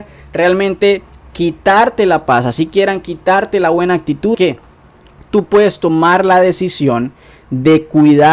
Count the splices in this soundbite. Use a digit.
1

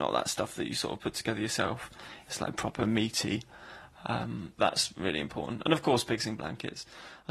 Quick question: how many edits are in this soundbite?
1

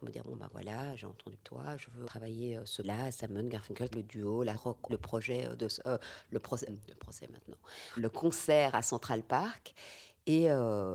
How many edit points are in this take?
8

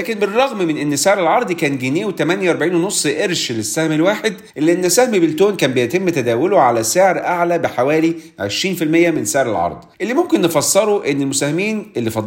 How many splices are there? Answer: 2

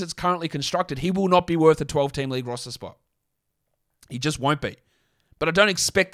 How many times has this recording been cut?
0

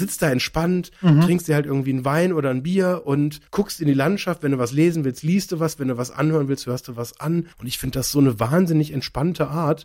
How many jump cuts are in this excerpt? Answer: 2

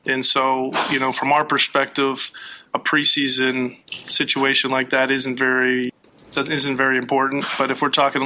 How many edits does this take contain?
0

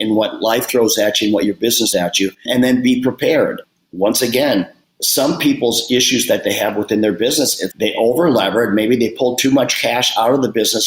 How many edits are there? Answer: 3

